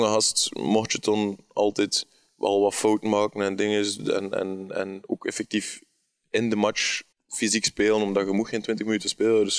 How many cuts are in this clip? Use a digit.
1